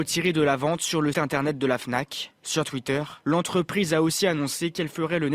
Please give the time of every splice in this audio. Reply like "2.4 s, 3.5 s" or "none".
1.1 s, 2.4 s, 3.2 s